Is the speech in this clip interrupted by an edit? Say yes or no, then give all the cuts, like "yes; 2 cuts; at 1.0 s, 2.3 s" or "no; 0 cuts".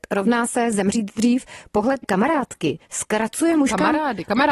yes; 1 cut; at 2.0 s